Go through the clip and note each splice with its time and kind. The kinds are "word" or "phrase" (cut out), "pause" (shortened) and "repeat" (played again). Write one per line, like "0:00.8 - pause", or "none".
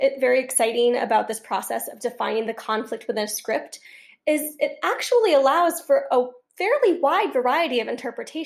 none